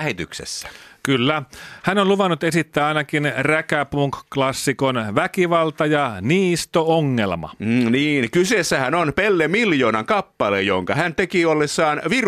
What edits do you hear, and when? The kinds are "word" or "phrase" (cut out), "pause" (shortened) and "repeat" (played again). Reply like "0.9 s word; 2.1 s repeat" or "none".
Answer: none